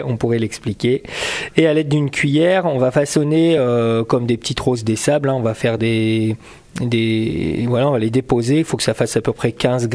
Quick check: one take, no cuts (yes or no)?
yes